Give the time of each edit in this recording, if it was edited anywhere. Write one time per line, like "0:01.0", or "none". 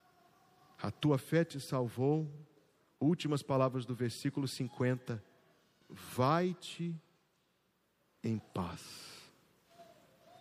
none